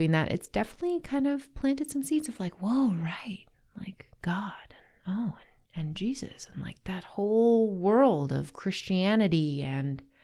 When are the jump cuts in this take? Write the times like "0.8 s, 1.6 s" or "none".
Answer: none